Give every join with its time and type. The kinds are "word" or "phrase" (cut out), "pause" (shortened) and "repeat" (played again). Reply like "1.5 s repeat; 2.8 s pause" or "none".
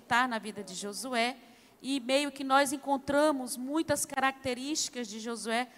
none

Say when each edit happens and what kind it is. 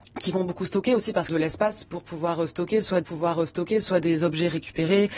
1.3 s phrase; 3.0 s repeat

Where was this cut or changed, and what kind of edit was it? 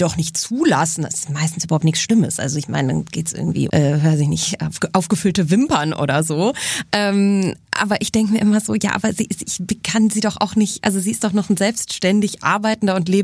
3.7 s word

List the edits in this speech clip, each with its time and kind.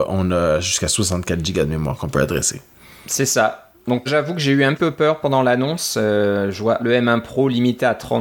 4.1 s word; 4.8 s word; 6.8 s word

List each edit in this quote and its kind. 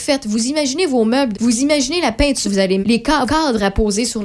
1.3 s word; 2.4 s word; 2.8 s word; 3.3 s word

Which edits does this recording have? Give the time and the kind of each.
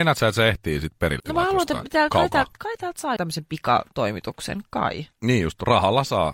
1.2 s word; 3.2 s word

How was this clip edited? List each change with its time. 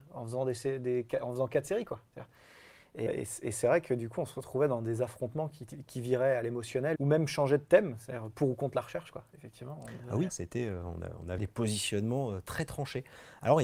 3.1 s word; 7.0 s word; 10.3 s word; 11.4 s word

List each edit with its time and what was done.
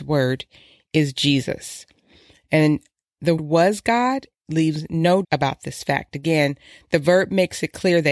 3.4 s word; 5.2 s word

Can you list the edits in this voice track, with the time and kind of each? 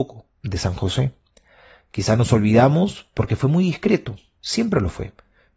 none

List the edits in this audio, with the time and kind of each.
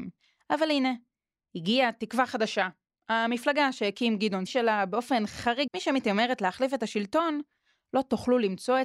4.5 s phrase; 5.7 s phrase

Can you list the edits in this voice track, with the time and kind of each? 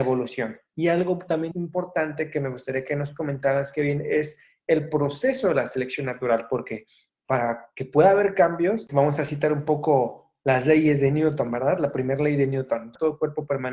1.5 s word; 8.9 s word

